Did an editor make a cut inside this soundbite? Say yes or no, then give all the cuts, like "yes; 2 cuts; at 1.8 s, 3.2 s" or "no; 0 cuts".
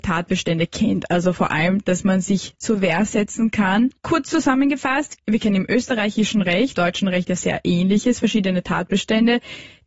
yes; 2 cuts; at 4.0 s, 6.7 s